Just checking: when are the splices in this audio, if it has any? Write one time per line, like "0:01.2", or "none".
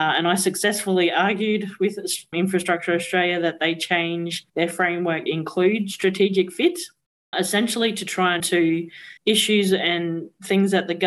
0:02.3
0:04.5
0:05.3
0:07.3
0:08.4
0:09.2

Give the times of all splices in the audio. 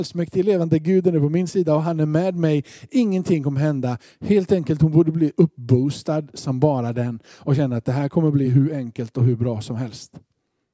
none

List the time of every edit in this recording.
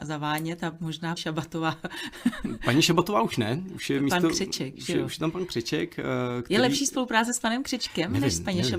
0:01.2

